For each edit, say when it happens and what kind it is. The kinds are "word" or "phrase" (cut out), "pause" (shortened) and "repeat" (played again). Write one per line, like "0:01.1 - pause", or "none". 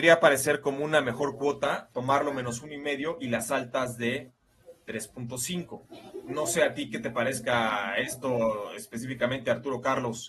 none

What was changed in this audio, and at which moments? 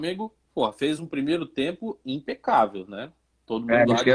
none

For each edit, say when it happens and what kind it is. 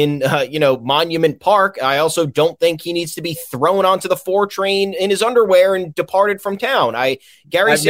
none

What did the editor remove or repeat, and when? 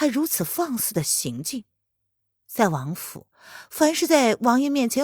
none

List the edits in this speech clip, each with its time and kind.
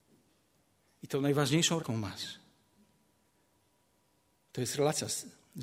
0:01.8 - word

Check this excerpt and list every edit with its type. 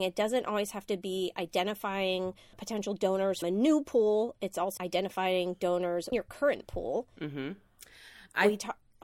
0:02.5 - word
0:03.4 - word
0:04.8 - word
0:06.1 - word

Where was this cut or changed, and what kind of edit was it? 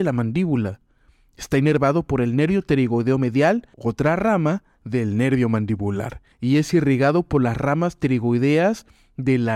0:03.7 - pause
0:06.3 - pause

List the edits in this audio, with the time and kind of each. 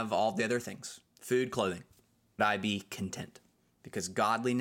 0:01.1 - pause
0:02.4 - word
0:03.5 - pause

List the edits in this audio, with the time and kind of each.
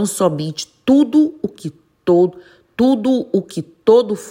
none

